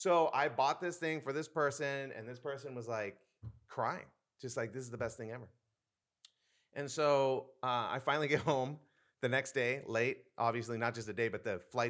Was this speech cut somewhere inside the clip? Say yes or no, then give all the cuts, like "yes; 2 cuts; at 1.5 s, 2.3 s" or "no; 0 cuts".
no; 0 cuts